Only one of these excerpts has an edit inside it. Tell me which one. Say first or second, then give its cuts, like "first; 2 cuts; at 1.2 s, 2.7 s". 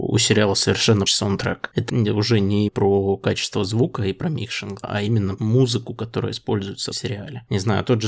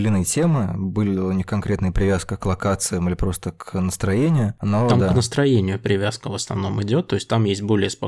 first; 6 cuts; at 1.1 s, 1.9 s, 2.7 s, 4.8 s, 5.4 s, 6.9 s